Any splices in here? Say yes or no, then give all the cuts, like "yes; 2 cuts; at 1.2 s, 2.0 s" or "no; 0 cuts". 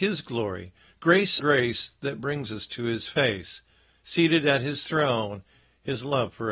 yes; 1 cut; at 1.4 s